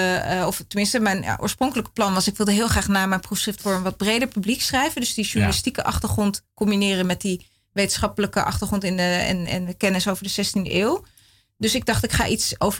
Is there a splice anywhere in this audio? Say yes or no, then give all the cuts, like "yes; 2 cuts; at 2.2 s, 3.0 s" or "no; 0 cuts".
no; 0 cuts